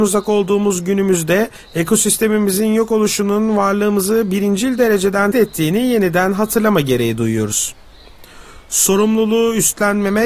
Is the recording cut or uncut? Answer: cut